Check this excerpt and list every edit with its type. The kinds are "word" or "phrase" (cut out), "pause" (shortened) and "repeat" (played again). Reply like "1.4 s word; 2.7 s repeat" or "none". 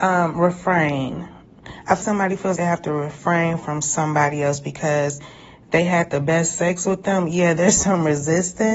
2.0 s word; 2.6 s word